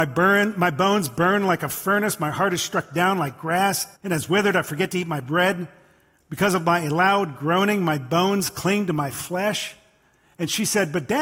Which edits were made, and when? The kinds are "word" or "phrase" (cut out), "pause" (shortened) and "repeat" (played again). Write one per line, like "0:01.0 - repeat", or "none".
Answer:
0:04.0 - pause

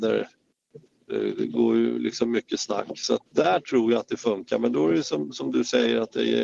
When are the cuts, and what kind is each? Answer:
0:03.3 - pause

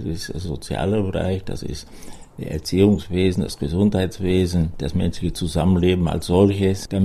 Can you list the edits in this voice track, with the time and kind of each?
none

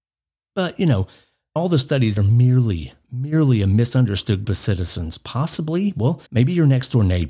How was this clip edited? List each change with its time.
0:01.6 - word
0:02.2 - phrase
0:04.4 - word
0:06.3 - pause

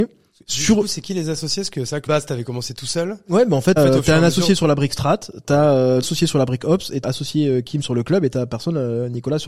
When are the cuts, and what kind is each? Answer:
0:02.1 - word
0:03.8 - word
0:06.0 - word
0:07.0 - word

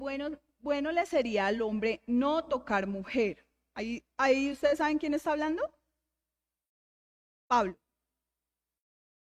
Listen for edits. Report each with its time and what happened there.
none

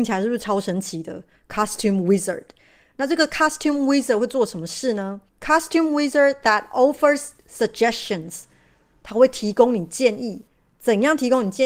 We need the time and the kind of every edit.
0:05.3 - pause

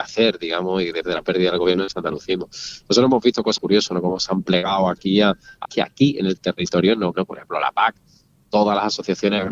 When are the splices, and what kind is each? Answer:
0:01.0 - word
0:03.6 - word
0:05.6 - word
0:07.1 - word

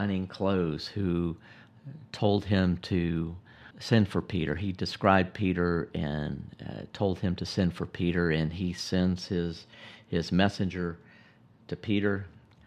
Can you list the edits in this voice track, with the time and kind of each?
0:03.7 - pause

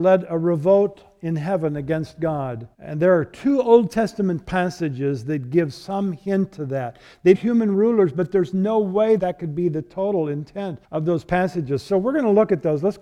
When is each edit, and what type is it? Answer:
0:02.7 - pause
0:07.3 - word
0:09.2 - word
0:10.8 - pause

